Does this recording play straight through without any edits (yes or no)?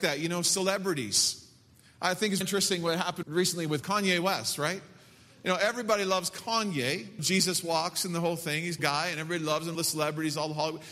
no